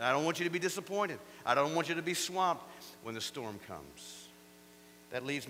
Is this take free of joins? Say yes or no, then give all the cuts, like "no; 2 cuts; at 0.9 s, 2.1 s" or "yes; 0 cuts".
yes; 0 cuts